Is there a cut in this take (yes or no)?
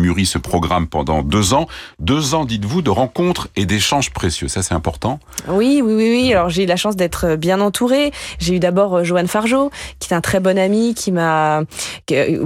no